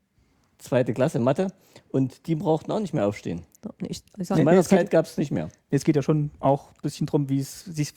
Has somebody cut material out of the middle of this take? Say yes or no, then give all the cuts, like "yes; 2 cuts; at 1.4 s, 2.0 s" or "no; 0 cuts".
no; 0 cuts